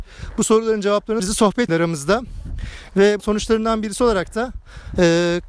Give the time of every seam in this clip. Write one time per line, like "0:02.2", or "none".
0:01.2
0:01.7
0:03.2